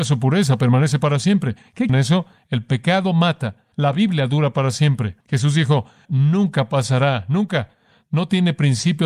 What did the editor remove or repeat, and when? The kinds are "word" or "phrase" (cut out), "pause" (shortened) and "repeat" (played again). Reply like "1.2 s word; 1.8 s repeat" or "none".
1.9 s phrase; 3.7 s pause; 5.2 s pause; 6.0 s phrase